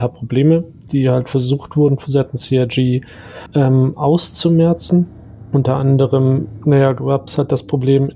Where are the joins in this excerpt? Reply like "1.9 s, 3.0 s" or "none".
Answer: 3.5 s